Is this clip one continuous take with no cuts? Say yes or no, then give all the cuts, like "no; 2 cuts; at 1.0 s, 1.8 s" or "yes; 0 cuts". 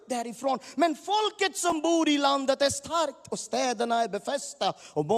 yes; 0 cuts